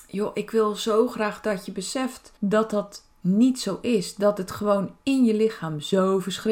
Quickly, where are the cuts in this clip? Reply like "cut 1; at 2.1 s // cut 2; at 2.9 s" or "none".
cut 1; at 2.4 s

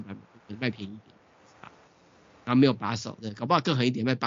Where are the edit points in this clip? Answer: none

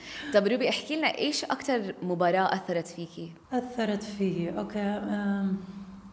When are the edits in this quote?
cut 1; at 3.4 s

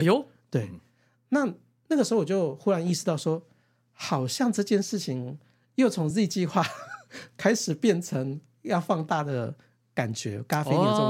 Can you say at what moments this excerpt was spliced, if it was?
none

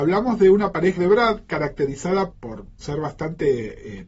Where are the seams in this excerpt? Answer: cut 1; at 1.0 s // cut 2; at 2.3 s // cut 3; at 2.8 s

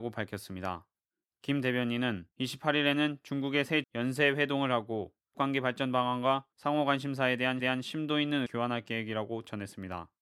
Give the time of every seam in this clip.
cut 1; at 2.3 s // cut 2; at 3.8 s // cut 3; at 5.3 s // cut 4; at 6.5 s // cut 5; at 7.6 s // cut 6; at 8.5 s

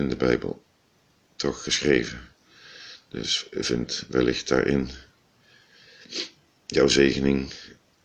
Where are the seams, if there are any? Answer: none

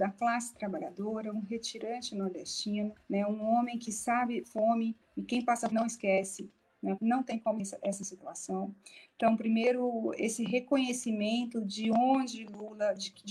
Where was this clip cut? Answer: cut 1; at 3.0 s // cut 2; at 4.4 s // cut 3; at 5.7 s // cut 4; at 7.0 s // cut 5; at 7.6 s

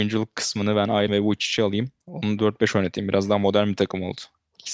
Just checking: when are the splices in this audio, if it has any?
cut 1; at 1.1 s // cut 2; at 2.4 s

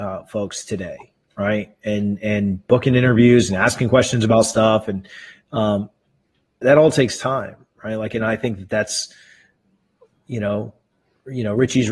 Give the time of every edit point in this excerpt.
cut 1; at 6.6 s

